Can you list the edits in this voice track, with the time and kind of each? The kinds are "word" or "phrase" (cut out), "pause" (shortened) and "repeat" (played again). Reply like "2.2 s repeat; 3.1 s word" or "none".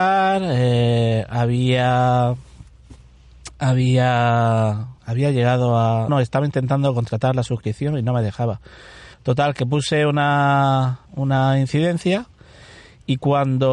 5.0 s pause; 6.1 s word; 9.1 s pause; 11.1 s pause